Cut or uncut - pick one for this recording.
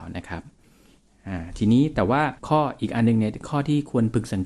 cut